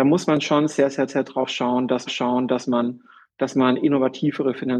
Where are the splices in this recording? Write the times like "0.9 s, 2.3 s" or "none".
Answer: 1.1 s, 2.1 s